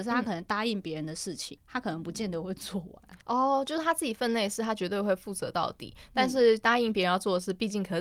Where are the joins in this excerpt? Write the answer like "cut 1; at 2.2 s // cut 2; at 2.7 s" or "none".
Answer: cut 1; at 1.6 s // cut 2; at 3.2 s